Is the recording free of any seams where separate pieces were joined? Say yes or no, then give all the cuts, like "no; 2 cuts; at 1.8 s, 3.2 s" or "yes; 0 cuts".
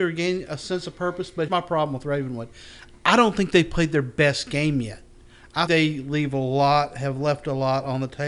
no; 2 cuts; at 1.5 s, 5.7 s